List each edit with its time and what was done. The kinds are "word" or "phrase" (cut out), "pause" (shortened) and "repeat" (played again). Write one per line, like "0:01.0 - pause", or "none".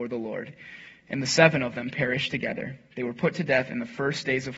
none